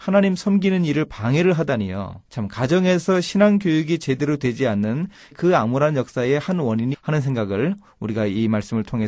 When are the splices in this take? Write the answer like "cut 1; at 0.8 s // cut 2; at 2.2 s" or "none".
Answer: cut 1; at 2.3 s // cut 2; at 5.3 s // cut 3; at 6.9 s